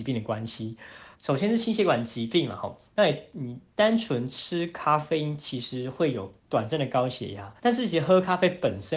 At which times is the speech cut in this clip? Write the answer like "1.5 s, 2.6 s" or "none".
1.1 s, 3.7 s, 6.4 s, 7.6 s